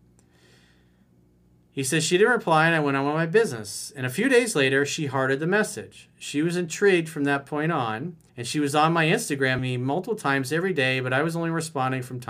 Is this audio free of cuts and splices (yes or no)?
no